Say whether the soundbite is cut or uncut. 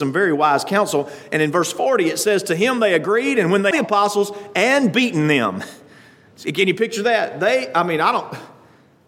cut